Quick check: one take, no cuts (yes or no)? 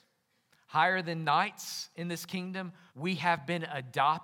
no